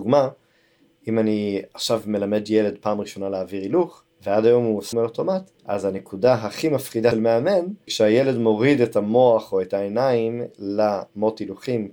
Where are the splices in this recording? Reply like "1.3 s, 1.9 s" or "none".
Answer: 4.1 s, 4.9 s, 5.5 s, 7.1 s, 7.9 s